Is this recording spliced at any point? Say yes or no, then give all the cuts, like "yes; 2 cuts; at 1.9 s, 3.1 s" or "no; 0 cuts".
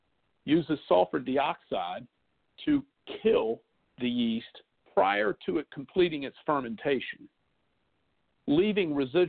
no; 0 cuts